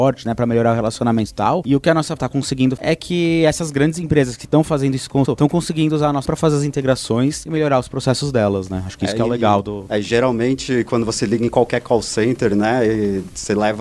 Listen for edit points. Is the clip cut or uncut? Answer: cut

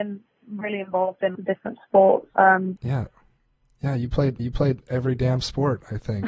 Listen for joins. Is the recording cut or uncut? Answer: cut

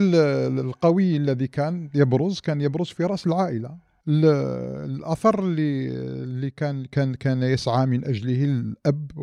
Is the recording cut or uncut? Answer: uncut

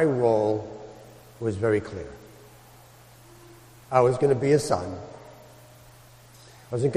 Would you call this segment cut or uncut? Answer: uncut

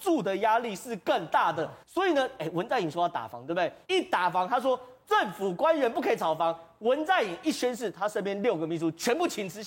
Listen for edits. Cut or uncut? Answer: cut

